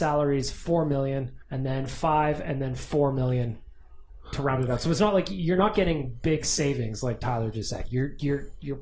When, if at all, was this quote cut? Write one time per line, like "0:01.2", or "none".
0:01.4